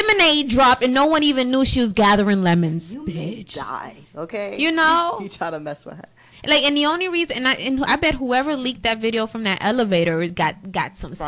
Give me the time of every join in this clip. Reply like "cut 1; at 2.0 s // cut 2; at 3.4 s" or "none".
cut 1; at 4.0 s